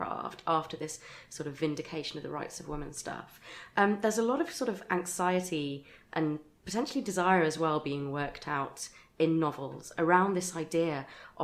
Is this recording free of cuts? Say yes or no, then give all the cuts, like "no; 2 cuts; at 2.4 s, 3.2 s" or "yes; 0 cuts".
yes; 0 cuts